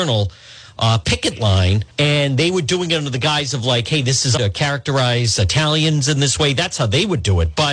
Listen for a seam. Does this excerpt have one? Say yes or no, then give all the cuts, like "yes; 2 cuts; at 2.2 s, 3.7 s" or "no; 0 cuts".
yes; 2 cuts; at 1.9 s, 4.4 s